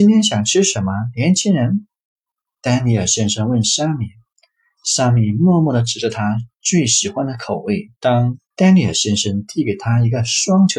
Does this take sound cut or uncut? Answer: cut